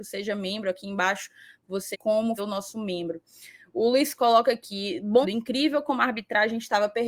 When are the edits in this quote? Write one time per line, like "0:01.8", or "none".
0:01.9
0:02.4
0:04.1
0:05.2